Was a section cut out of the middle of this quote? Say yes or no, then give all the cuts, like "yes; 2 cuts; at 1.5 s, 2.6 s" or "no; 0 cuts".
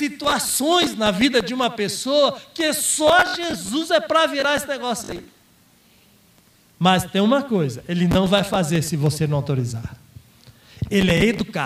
no; 0 cuts